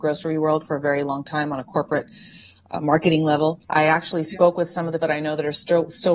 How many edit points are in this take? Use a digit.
2